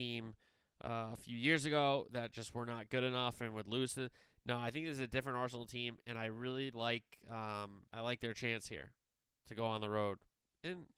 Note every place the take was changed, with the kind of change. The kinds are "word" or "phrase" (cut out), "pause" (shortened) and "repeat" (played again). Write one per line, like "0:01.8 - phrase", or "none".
0:07.9 - pause

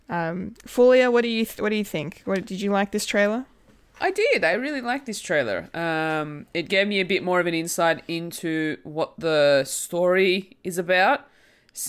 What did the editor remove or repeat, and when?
none

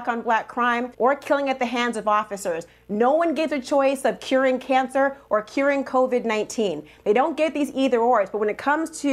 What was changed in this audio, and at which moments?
0:00.9 - pause

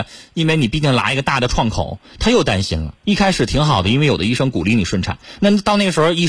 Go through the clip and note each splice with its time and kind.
0:03.0 - pause

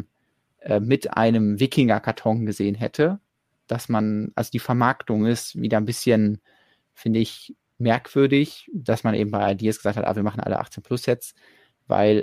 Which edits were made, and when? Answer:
none

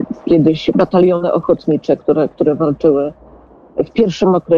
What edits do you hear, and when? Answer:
none

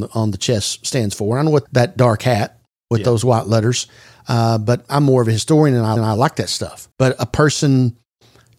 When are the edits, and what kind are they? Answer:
0:01.7 - word
0:06.0 - repeat
0:06.9 - pause

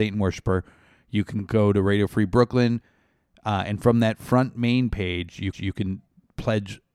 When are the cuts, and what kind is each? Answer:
0:05.5 - repeat

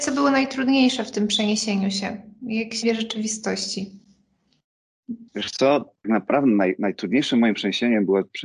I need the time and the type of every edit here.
0:02.8 - word
0:05.3 - pause
0:06.0 - word

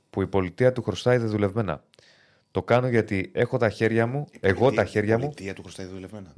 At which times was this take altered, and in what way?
none

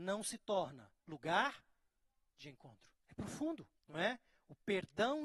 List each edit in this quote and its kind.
0:01.0 - pause
0:03.0 - pause
0:03.8 - pause

